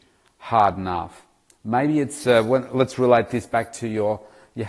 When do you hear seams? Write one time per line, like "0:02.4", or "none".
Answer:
none